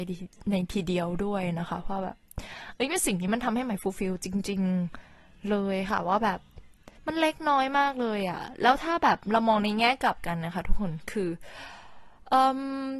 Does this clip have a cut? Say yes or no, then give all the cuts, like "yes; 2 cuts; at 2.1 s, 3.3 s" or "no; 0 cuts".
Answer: yes; 1 cut; at 7.0 s